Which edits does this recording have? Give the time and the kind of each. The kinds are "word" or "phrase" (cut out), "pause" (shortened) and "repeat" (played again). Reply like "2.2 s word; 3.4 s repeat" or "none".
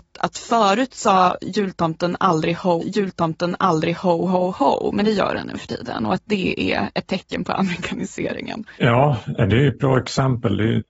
2.8 s repeat; 8.8 s pause